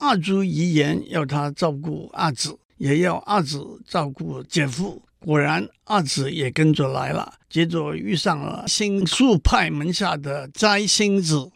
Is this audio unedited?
no; 3 cuts; at 2.7 s, 5.1 s, 7.4 s

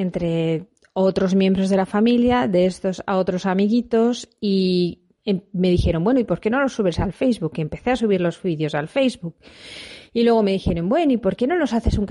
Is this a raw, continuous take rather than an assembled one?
no; 1 cut; at 5.2 s

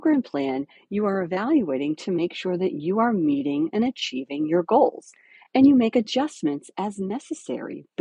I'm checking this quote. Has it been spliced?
no; 0 cuts

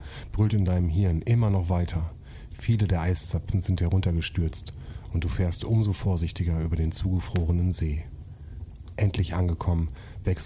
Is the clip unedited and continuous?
yes; 0 cuts

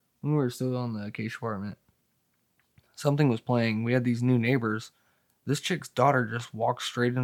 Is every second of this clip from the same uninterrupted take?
yes; 0 cuts

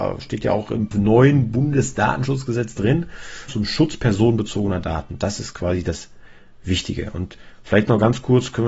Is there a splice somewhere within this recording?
yes; 2 cuts; at 0.9 s, 3.5 s

